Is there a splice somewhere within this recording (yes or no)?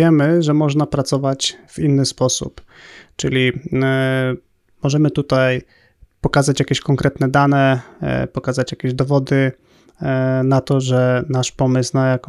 no